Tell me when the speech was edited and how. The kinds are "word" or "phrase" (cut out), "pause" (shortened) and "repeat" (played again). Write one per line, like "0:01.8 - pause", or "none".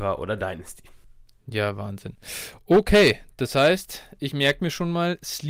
none